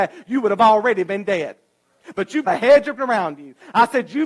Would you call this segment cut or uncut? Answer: cut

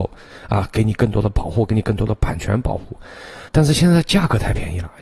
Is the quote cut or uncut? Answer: cut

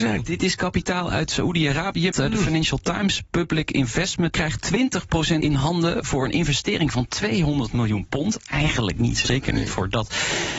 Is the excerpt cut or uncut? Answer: cut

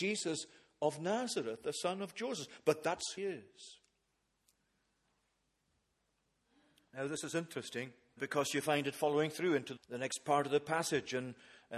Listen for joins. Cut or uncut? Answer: cut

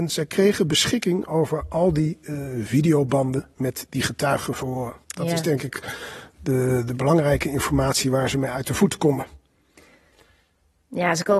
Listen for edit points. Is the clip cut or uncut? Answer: cut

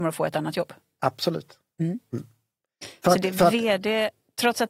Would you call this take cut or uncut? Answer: uncut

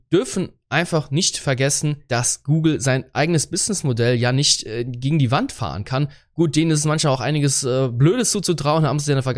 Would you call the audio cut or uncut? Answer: uncut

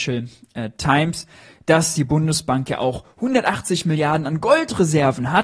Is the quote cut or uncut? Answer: uncut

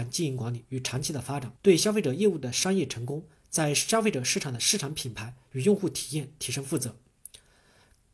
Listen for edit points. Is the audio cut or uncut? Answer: cut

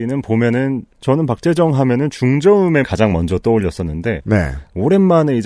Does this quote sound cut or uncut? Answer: cut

